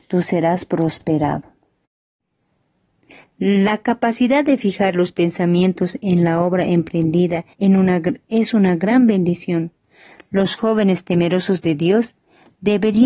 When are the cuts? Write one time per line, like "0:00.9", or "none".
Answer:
0:07.5